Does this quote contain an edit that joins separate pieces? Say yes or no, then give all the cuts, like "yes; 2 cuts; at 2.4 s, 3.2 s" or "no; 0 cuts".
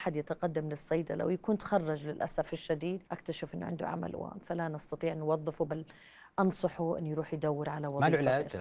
yes; 1 cut; at 3.1 s